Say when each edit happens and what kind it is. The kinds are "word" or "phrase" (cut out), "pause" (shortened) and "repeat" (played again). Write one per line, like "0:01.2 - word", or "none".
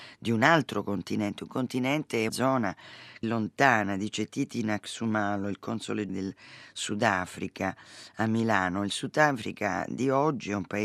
0:02.3 - word
0:03.2 - word
0:06.1 - word